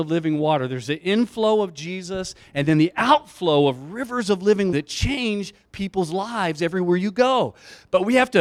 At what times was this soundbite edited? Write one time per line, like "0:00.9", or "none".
0:04.7